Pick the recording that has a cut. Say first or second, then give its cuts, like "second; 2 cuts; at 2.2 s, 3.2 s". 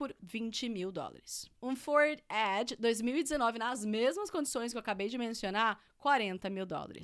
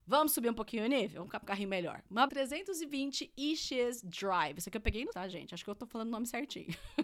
second; 3 cuts; at 1.4 s, 2.3 s, 5.1 s